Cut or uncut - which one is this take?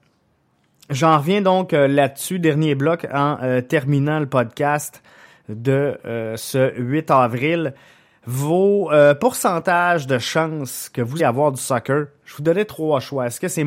cut